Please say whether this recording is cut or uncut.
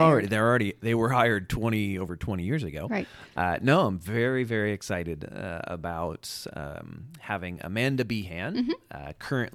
uncut